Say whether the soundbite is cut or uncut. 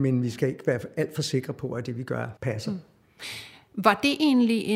cut